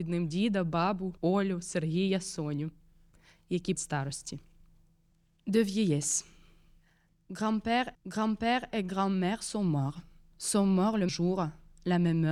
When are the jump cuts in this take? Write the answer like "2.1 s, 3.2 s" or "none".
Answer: 1.2 s, 3.7 s, 7.9 s, 11.1 s